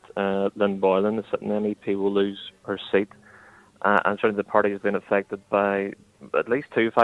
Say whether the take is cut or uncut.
uncut